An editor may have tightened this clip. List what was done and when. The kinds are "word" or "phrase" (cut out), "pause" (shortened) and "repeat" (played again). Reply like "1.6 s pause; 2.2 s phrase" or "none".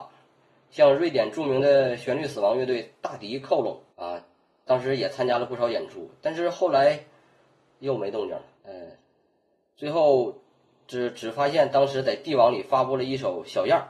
3.9 s pause; 8.5 s pause